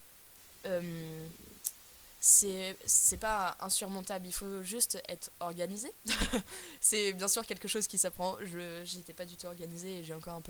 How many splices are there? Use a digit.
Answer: 0